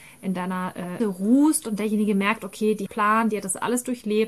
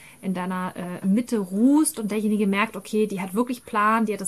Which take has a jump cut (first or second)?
first